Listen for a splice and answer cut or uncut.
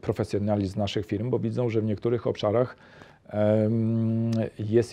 uncut